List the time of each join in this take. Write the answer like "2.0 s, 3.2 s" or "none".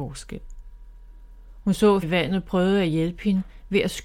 2.0 s